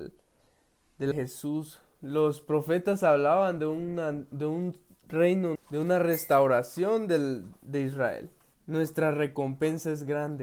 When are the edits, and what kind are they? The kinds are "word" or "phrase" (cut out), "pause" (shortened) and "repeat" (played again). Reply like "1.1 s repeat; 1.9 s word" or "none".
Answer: 1.1 s phrase; 5.5 s word